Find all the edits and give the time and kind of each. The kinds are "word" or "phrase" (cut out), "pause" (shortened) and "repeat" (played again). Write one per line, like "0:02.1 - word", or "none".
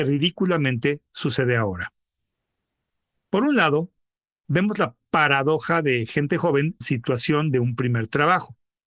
0:06.8 - word